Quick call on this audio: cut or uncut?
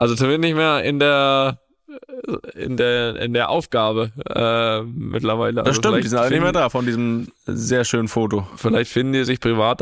uncut